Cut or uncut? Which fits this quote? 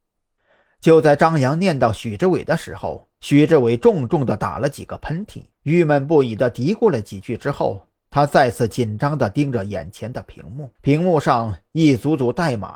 cut